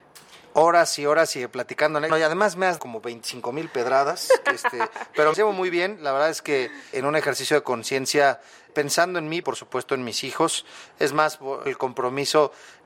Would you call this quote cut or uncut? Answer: cut